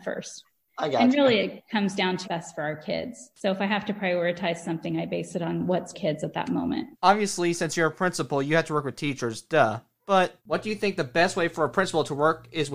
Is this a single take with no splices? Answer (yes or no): no